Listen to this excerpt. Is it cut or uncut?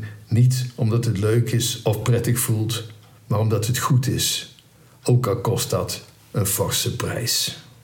uncut